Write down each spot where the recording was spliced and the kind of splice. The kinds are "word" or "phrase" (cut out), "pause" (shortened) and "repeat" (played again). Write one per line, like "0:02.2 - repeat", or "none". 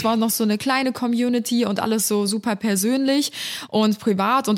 none